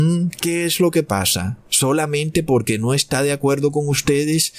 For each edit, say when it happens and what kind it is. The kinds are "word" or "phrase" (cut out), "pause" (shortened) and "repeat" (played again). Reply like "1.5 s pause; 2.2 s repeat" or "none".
1.7 s pause